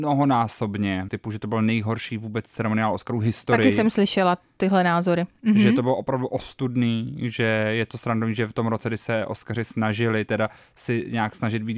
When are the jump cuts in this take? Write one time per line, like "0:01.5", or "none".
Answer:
0:01.1